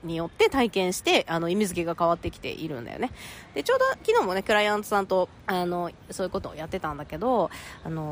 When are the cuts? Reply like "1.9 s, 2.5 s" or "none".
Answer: 5.4 s